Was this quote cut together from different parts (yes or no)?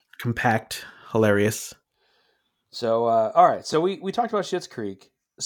no